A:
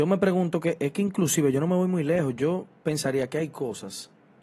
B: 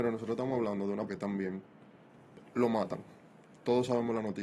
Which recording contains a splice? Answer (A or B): B